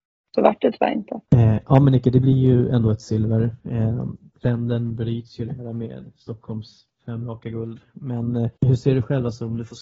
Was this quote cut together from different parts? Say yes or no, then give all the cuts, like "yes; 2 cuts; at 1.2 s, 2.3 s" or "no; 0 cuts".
yes; 2 cuts; at 1.3 s, 8.6 s